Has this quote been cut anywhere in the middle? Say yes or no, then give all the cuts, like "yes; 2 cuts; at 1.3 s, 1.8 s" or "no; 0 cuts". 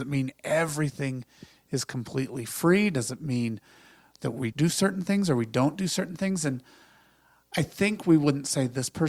yes; 1 cut; at 4.5 s